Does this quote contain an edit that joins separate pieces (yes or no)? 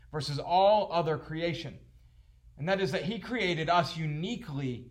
no